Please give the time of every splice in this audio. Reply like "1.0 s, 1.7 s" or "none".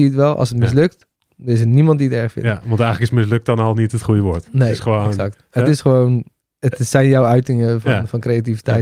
none